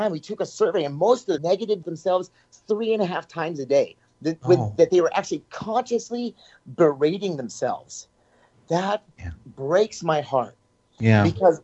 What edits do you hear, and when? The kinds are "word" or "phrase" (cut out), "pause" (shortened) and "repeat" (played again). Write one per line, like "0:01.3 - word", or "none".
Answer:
0:01.4 - phrase
0:01.8 - phrase